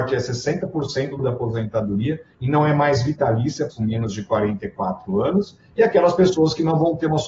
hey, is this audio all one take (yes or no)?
no